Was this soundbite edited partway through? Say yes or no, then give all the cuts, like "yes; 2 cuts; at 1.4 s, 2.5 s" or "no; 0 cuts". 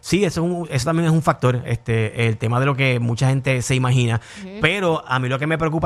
no; 0 cuts